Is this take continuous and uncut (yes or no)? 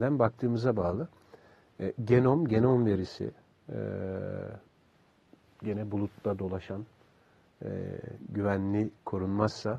yes